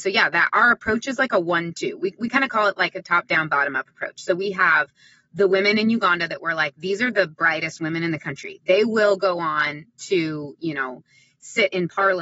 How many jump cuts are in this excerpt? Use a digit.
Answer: 0